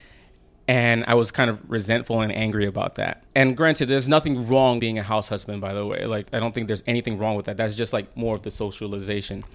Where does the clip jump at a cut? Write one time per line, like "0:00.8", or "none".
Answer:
0:03.3
0:04.8
0:06.2

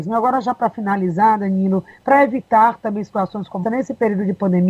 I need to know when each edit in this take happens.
0:03.6

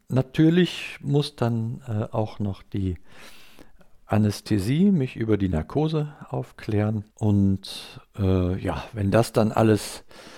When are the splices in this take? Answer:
0:07.1

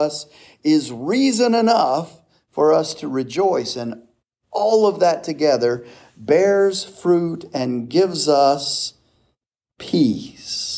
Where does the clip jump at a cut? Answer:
none

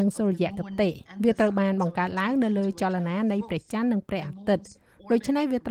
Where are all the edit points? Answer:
none

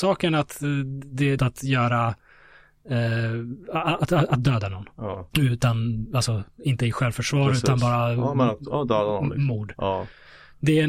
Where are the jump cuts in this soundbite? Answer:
0:01.4
0:05.3

